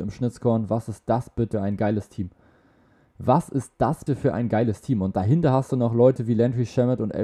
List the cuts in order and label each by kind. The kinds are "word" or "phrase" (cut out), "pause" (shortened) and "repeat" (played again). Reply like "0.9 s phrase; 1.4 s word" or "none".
1.5 s word; 4.1 s word